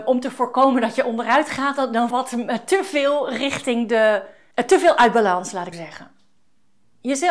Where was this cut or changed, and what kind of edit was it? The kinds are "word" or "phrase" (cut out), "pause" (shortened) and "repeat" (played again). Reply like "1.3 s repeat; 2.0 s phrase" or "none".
2.1 s phrase; 5.7 s phrase